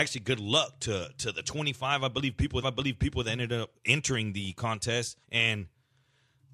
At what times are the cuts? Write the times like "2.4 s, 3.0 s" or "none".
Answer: 2.6 s, 3.7 s, 5.2 s